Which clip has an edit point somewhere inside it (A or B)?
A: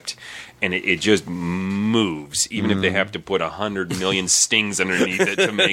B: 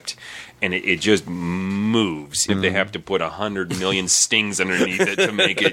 B